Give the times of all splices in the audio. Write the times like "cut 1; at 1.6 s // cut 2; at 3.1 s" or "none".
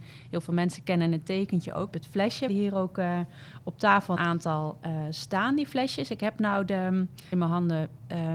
cut 1; at 1.9 s // cut 2; at 2.5 s // cut 3; at 4.2 s // cut 4; at 7.3 s